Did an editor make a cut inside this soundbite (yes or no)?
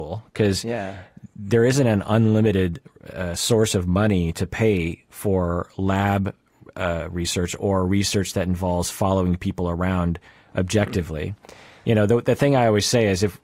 no